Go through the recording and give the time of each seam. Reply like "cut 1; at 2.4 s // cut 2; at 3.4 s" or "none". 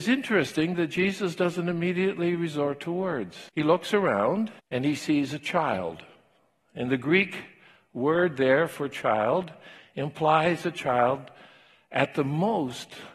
cut 1; at 3.5 s // cut 2; at 4.6 s